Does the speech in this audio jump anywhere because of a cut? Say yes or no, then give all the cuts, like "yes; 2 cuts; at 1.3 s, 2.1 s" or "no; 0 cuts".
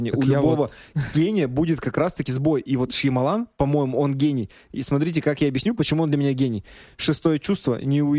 no; 0 cuts